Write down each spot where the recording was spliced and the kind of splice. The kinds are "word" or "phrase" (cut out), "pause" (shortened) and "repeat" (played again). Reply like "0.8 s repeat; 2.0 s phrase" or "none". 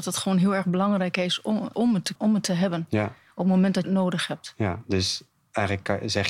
1.7 s word; 2.2 s word; 3.8 s word